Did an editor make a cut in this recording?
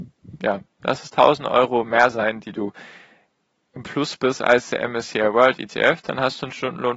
no; 0 cuts

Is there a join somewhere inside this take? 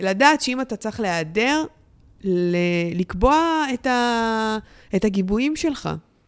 no; 0 cuts

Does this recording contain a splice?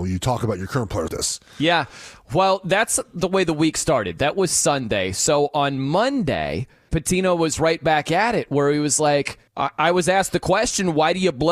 yes; 3 cuts; at 1.1 s, 6.9 s, 9.5 s

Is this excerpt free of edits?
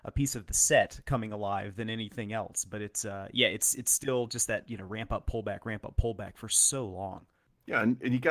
yes; 0 cuts

